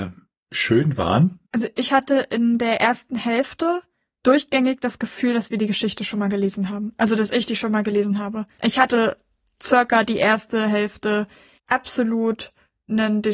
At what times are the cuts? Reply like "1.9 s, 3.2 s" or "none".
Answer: 1.5 s